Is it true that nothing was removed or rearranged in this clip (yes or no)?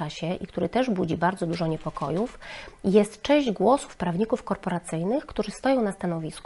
yes